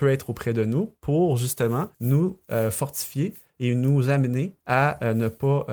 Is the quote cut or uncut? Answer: cut